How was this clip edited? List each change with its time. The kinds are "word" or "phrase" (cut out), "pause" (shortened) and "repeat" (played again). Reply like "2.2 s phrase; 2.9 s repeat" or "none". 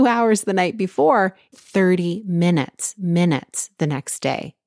1.5 s word; 3.0 s repeat